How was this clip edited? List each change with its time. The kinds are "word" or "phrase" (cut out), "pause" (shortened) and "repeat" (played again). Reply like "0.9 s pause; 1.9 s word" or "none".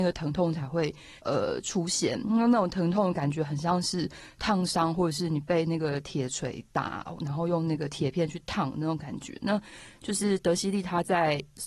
1.2 s pause